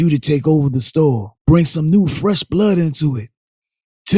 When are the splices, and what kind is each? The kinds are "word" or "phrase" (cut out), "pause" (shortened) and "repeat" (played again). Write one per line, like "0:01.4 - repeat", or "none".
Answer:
0:01.4 - pause